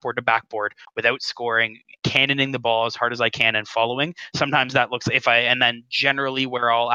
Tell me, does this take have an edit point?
no; 0 cuts

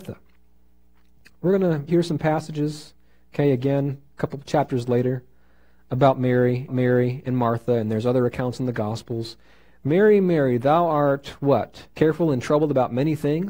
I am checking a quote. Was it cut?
yes; 3 cuts; at 1.9 s, 6.7 s, 11.9 s

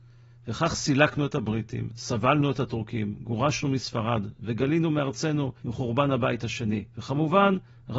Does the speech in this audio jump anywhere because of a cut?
yes; 2 cuts; at 5.6 s, 6.9 s

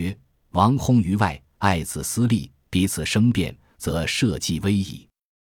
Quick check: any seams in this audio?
no; 0 cuts

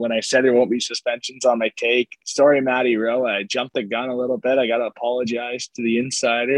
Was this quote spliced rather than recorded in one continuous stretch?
no; 0 cuts

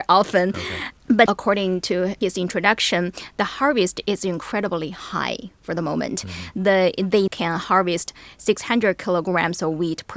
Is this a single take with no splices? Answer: no; 2 cuts; at 1.3 s, 7.3 s

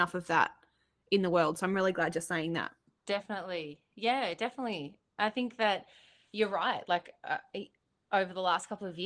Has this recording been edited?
no; 0 cuts

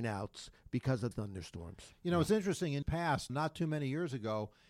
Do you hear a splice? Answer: yes; 3 cuts; at 1.1 s, 2.8 s, 3.3 s

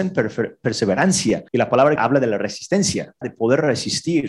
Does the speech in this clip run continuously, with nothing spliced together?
no; 3 cuts; at 1.5 s, 2.0 s, 3.2 s

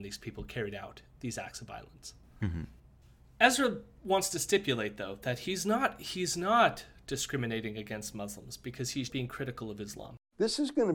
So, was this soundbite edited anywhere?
yes; 1 cut; at 9.1 s

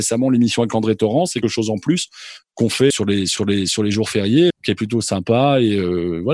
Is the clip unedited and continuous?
no; 4 cuts; at 1.4 s, 2.9 s, 3.4 s, 4.5 s

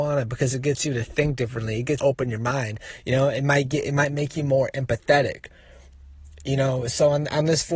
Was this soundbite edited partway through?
yes; 1 cut; at 2.0 s

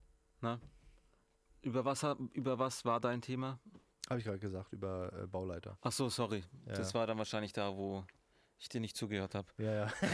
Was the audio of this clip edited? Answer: no; 0 cuts

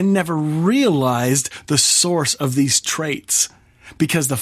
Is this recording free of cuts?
yes; 0 cuts

